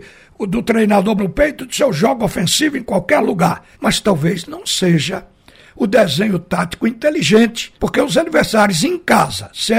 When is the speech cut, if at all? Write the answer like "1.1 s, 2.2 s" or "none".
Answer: 1.2 s, 3.7 s, 7.8 s